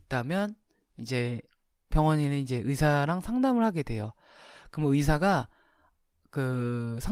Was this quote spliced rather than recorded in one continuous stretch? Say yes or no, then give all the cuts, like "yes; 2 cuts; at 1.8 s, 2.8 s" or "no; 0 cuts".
no; 0 cuts